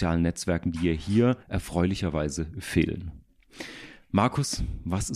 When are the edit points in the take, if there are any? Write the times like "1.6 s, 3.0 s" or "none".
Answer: 1.4 s

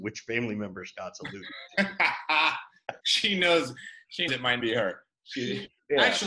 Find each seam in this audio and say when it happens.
3.0 s, 4.3 s, 4.6 s

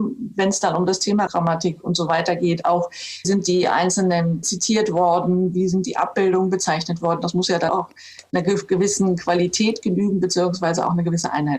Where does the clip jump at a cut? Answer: 1.3 s, 3.2 s, 4.4 s, 7.7 s

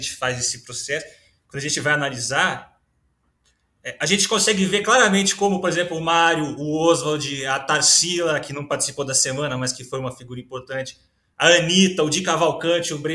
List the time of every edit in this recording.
none

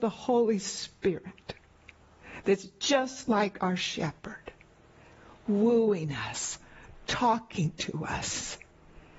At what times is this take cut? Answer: none

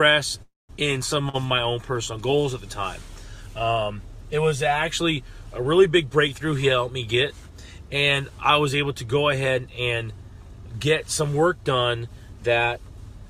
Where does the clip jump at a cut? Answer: none

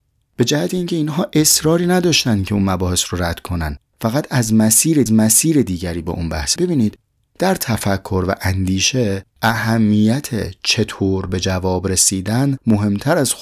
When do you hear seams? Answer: 5.1 s, 6.6 s, 9.3 s

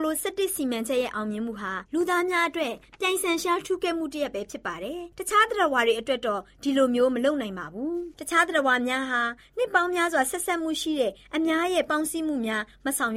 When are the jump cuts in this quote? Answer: 1.9 s

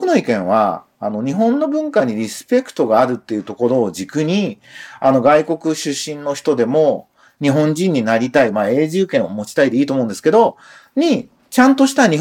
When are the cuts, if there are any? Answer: none

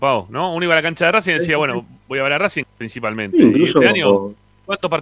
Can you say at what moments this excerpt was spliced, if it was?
2.6 s

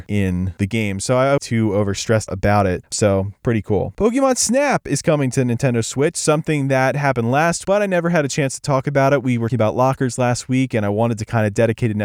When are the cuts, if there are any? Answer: 1.4 s, 2.3 s, 7.6 s, 9.5 s

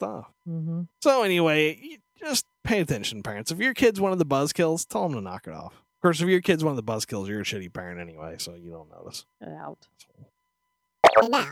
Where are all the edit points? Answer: 0.9 s, 2.5 s, 5.9 s, 9.3 s

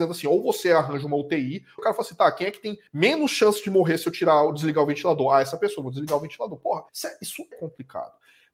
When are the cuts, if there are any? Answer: 1.8 s, 2.9 s, 6.9 s, 7.5 s

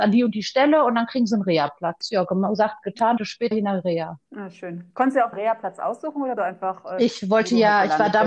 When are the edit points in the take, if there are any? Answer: 3.2 s, 3.5 s, 4.3 s, 4.9 s, 5.3 s, 6.4 s

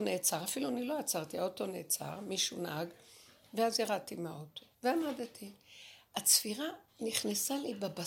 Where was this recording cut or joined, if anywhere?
4.7 s

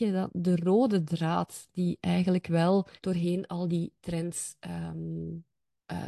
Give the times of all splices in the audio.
3.0 s

